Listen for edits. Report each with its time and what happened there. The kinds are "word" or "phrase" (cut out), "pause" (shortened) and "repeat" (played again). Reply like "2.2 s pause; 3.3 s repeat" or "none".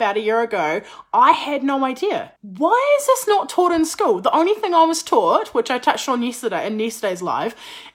2.4 s pause